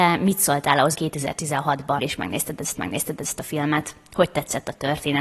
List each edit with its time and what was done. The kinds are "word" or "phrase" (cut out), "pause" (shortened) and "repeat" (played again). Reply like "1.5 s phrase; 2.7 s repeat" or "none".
0.9 s word; 2.0 s word; 2.8 s repeat